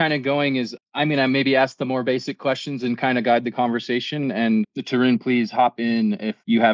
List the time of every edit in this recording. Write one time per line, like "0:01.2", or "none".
none

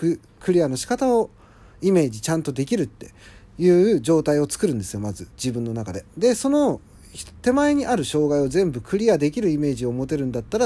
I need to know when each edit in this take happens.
none

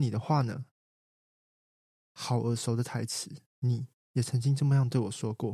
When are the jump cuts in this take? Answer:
0:03.5

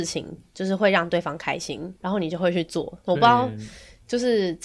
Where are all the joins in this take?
0:02.0

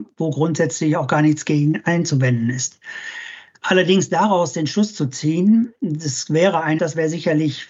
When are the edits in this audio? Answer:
0:06.8

